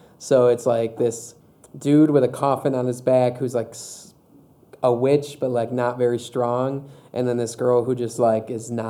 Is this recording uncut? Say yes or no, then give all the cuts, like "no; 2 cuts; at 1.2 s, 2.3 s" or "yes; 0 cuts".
yes; 0 cuts